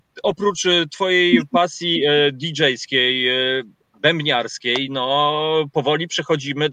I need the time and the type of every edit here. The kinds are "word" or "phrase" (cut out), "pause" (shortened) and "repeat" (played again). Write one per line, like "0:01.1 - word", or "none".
none